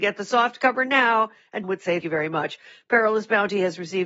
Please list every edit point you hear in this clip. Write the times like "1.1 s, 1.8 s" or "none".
1.6 s, 2.0 s